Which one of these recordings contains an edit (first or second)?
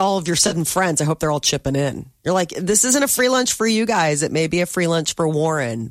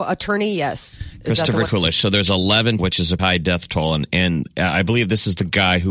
second